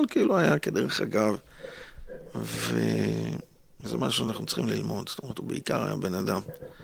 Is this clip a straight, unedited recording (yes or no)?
yes